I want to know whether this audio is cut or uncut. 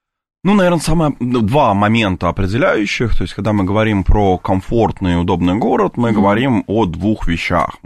uncut